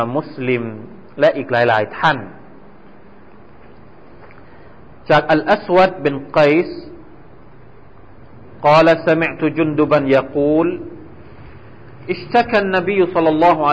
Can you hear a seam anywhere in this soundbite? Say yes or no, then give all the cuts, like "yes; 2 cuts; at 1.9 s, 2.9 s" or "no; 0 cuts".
no; 0 cuts